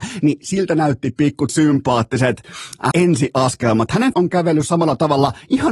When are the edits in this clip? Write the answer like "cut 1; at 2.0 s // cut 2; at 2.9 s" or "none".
cut 1; at 1.5 s // cut 2; at 2.9 s // cut 3; at 4.1 s